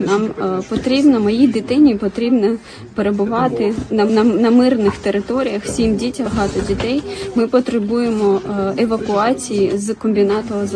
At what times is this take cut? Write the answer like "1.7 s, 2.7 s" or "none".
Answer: 4.1 s, 6.2 s